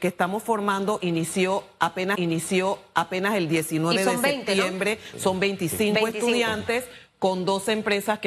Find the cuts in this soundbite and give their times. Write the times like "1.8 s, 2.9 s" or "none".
2.1 s